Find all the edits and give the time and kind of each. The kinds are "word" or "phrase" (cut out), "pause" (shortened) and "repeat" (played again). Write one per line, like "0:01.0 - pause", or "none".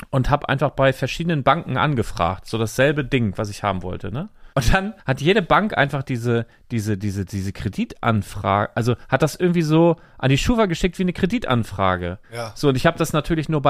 0:04.5 - pause
0:05.0 - pause
0:12.2 - pause